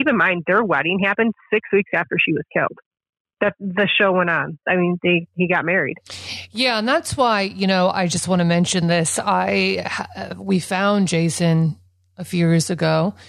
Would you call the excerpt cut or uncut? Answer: uncut